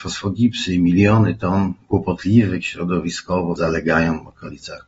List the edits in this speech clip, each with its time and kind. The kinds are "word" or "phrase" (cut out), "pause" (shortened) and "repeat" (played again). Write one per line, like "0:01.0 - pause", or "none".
0:03.6 - word